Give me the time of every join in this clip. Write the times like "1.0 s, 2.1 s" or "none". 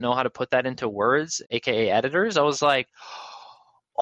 none